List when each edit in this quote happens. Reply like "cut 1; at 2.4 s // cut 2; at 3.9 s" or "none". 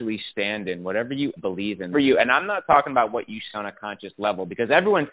cut 1; at 1.4 s // cut 2; at 1.9 s // cut 3; at 3.5 s